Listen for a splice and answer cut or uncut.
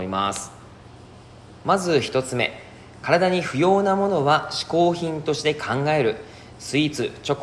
cut